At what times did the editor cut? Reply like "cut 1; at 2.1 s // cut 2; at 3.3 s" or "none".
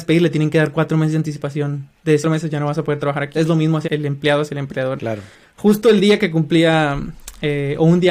cut 1; at 2.2 s // cut 2; at 3.3 s // cut 3; at 3.8 s // cut 4; at 5.0 s